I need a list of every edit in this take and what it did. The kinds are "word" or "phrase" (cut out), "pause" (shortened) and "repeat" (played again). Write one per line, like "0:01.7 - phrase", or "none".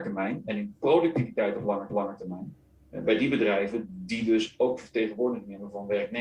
0:01.9 - repeat